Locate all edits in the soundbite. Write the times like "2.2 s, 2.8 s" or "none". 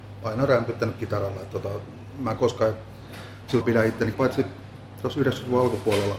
3.6 s, 4.1 s